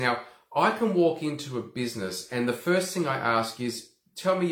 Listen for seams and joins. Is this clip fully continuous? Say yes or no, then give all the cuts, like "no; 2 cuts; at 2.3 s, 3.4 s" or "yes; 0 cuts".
yes; 0 cuts